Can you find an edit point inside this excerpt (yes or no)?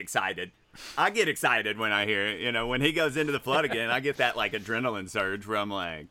no